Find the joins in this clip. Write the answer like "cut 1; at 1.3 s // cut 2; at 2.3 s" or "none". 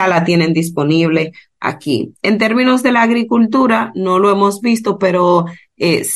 none